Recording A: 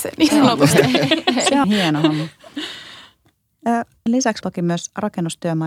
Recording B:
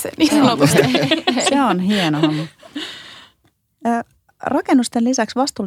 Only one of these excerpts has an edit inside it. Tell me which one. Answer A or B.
A